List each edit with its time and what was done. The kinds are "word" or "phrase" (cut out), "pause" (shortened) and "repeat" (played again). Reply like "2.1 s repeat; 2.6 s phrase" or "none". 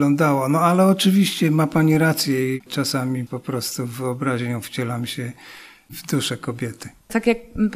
3.3 s word